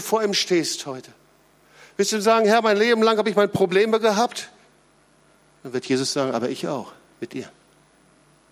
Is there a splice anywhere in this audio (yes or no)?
no